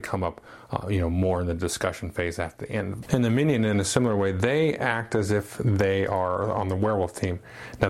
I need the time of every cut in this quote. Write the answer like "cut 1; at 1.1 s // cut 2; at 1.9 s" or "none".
cut 1; at 3.0 s